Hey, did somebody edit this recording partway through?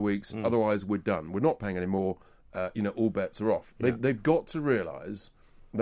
no; 0 cuts

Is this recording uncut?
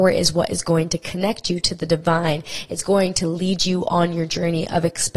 yes; 0 cuts

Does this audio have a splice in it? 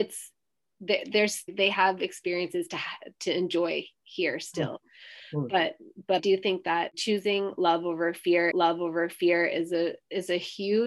yes; 3 cuts; at 1.5 s, 6.2 s, 8.5 s

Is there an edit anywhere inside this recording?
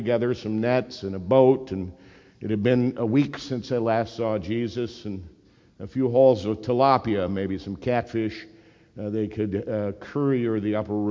no; 0 cuts

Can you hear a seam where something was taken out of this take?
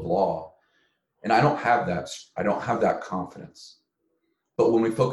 no; 0 cuts

